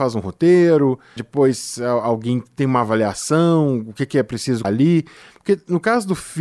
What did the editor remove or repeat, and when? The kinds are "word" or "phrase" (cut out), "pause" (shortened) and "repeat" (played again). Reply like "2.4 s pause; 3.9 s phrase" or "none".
1.2 s word; 4.6 s word